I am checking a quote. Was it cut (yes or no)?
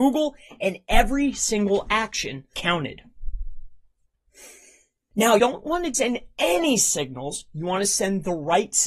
yes